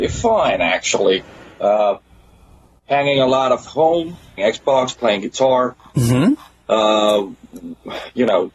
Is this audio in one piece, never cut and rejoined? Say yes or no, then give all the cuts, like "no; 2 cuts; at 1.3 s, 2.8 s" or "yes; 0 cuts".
no; 2 cuts; at 3.7 s, 4.4 s